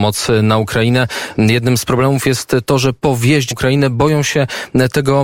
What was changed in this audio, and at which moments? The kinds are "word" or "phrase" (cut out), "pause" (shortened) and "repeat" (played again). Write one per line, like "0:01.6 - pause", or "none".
0:03.5 - word